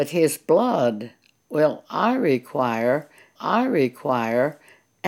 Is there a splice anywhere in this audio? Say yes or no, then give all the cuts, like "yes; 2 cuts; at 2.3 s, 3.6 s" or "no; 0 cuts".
yes; 1 cut; at 3.4 s